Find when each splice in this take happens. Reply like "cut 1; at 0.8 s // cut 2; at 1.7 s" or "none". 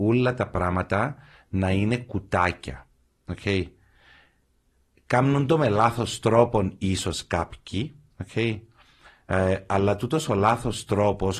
none